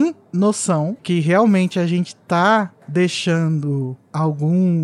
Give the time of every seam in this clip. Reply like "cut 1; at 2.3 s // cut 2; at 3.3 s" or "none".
cut 1; at 1.0 s